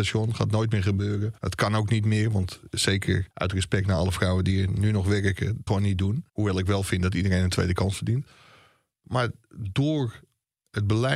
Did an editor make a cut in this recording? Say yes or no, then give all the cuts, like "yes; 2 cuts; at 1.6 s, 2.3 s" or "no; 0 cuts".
yes; 4 cuts; at 1.4 s, 3.3 s, 5.7 s, 6.3 s